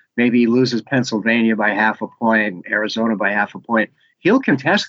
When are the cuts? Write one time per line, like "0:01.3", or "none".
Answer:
none